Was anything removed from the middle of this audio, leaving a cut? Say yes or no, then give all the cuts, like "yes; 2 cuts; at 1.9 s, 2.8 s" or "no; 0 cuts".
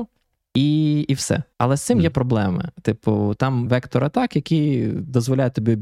yes; 3 cuts; at 1.5 s, 2.1 s, 3.7 s